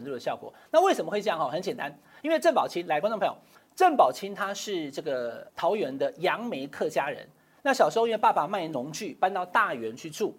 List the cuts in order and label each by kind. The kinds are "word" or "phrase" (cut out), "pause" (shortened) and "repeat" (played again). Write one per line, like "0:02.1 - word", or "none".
0:05.5 - pause